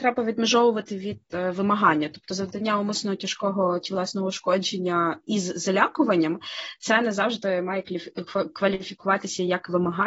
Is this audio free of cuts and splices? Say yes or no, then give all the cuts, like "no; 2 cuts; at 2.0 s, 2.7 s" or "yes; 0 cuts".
yes; 0 cuts